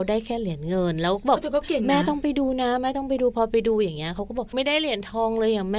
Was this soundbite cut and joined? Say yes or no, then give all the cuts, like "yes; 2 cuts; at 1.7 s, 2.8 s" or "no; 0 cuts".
yes; 1 cut; at 4.5 s